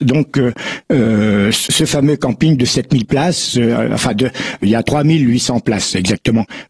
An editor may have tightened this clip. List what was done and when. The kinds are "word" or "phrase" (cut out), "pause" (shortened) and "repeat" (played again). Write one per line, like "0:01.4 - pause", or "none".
0:04.6 - word